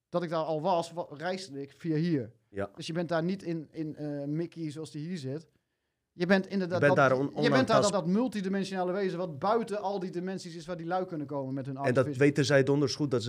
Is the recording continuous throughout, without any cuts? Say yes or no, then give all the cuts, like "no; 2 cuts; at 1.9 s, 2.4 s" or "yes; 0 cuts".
no; 1 cut; at 7.9 s